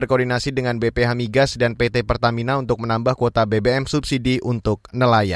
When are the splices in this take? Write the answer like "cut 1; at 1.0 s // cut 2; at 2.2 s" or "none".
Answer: none